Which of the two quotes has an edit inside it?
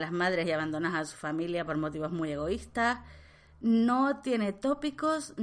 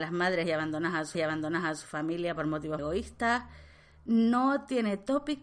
second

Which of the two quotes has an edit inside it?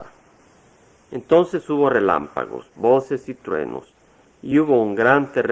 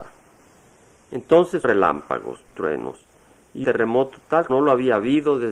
second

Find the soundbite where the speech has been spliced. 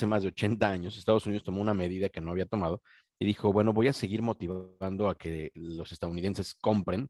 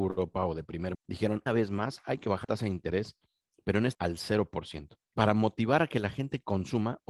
second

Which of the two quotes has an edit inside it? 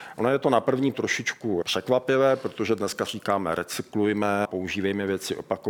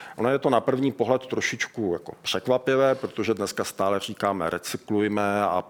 first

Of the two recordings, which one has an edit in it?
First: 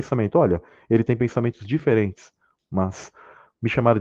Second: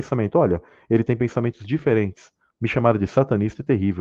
second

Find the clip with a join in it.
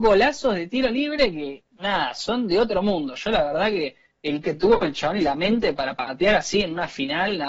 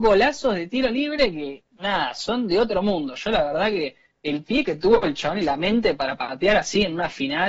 first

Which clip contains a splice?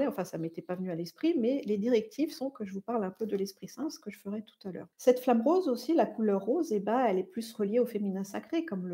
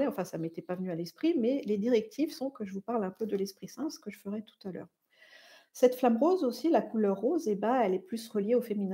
first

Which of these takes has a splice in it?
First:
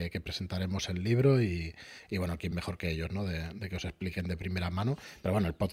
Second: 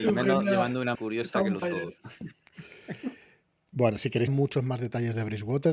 second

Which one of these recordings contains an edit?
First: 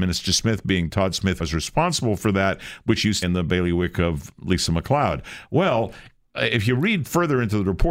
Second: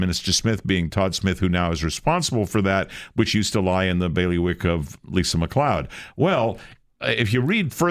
first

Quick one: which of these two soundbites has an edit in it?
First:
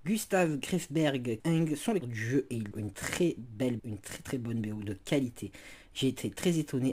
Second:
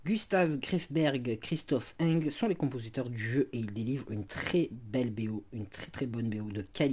first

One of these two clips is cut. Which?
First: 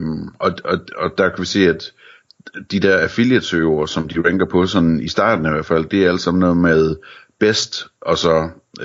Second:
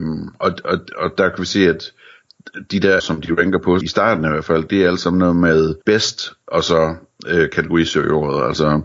second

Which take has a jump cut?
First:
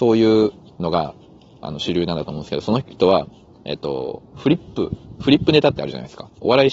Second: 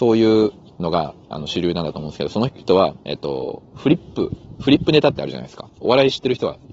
second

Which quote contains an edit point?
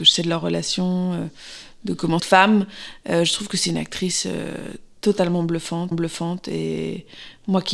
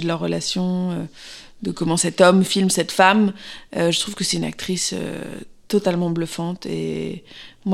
first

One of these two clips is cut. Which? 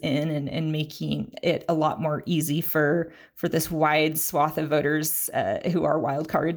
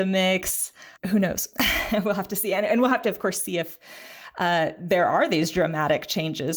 second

